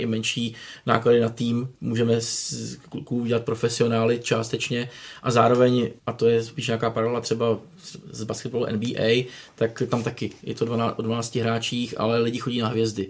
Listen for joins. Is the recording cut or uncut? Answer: cut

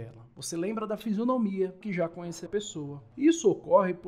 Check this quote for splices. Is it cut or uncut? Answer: cut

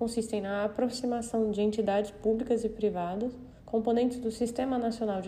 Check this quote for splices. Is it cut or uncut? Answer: cut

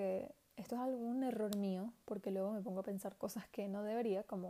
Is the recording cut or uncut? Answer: uncut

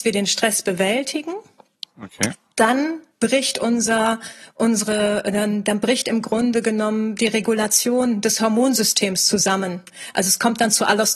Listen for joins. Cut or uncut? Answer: uncut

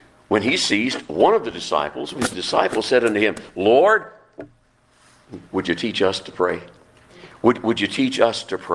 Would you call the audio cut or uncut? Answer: cut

